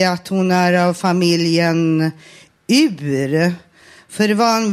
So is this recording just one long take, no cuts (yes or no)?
yes